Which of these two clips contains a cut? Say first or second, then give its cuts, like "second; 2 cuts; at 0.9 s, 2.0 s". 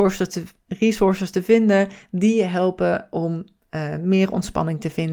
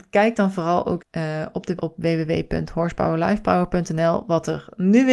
second; 2 cuts; at 1.0 s, 1.8 s